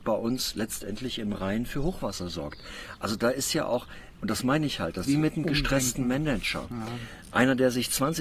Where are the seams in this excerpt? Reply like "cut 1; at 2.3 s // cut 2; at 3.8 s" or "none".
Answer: cut 1; at 5.0 s